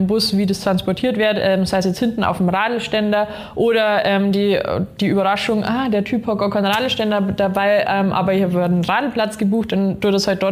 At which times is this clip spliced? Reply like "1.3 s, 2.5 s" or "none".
none